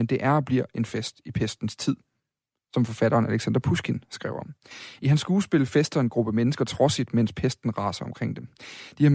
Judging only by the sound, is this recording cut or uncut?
uncut